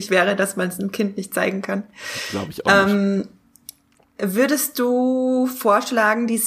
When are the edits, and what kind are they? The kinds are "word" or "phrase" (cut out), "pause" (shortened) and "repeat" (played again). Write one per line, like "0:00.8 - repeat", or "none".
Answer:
none